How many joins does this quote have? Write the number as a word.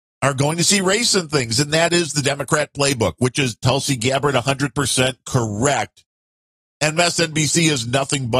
zero